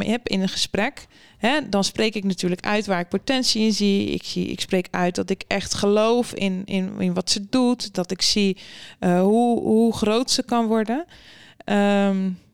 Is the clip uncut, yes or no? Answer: yes